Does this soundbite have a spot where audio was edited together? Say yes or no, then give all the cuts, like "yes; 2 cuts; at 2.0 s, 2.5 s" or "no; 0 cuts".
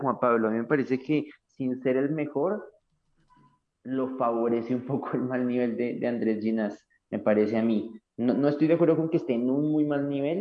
no; 0 cuts